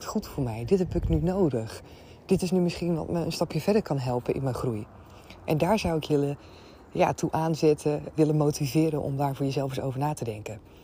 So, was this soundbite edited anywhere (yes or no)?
yes